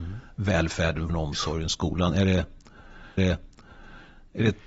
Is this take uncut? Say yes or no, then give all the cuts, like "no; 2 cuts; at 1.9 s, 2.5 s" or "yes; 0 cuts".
no; 2 cuts; at 1.1 s, 3.2 s